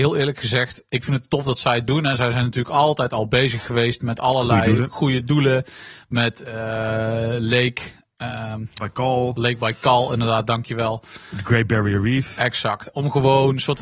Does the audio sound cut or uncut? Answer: uncut